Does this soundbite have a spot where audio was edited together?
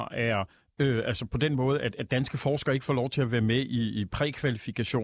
no; 0 cuts

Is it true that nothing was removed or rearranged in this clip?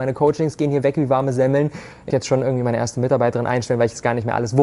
no; 1 cut; at 2.1 s

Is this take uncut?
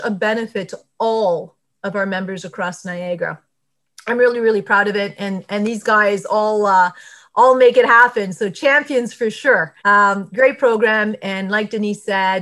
no; 1 cut; at 9.8 s

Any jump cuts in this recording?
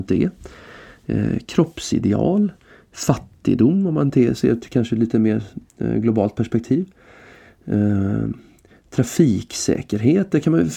no; 0 cuts

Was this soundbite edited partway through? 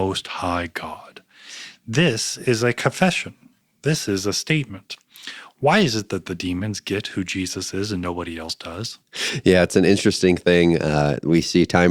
no; 0 cuts

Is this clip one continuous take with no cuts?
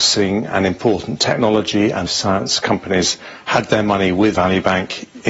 no; 2 cuts; at 2.1 s, 4.4 s

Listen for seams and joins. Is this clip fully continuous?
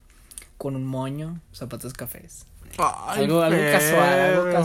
no; 1 cut; at 1.5 s

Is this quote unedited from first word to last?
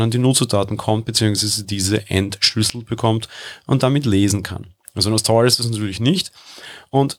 yes; 0 cuts

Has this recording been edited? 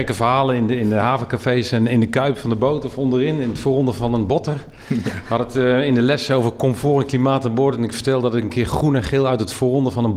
no; 0 cuts

